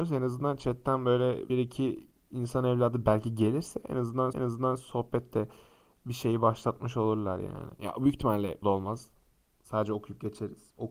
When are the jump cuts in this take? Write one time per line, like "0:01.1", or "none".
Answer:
0:01.5
0:04.3
0:08.6